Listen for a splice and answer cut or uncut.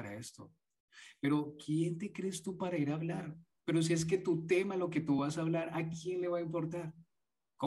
uncut